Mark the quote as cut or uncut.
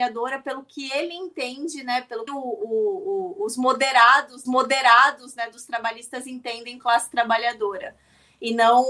cut